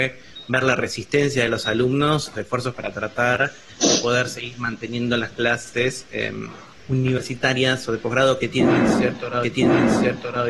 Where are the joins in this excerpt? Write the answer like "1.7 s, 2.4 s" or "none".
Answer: 2.3 s, 2.7 s, 6.8 s, 9.4 s